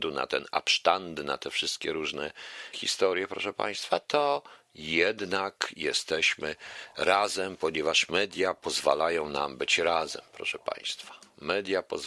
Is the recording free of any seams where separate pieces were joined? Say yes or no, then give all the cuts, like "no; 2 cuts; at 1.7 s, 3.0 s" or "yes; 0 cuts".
no; 1 cut; at 2.7 s